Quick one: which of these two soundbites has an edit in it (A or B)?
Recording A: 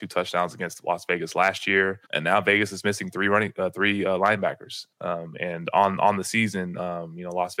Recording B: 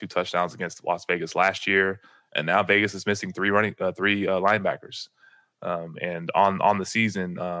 A